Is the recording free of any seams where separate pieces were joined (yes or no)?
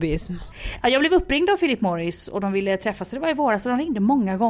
yes